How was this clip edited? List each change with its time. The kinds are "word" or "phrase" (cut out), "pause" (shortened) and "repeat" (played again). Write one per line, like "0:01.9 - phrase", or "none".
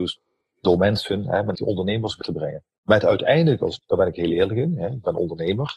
0:01.6 - phrase
0:02.2 - word
0:03.8 - word